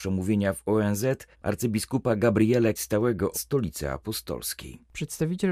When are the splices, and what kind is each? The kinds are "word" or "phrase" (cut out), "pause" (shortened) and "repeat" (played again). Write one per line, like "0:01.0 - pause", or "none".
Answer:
0:01.3 - pause
0:02.8 - word
0:03.3 - word